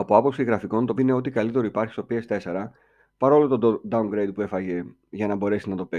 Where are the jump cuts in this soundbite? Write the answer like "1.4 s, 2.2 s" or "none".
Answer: 1.0 s